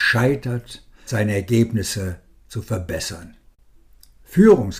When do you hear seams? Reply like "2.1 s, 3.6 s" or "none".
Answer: 1.1 s